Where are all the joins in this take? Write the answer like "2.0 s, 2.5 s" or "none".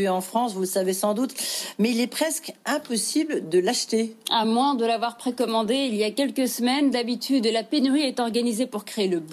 none